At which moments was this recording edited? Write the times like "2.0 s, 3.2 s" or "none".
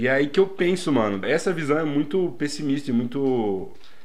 1.2 s